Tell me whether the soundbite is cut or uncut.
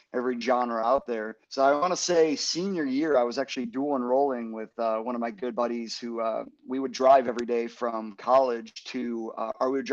cut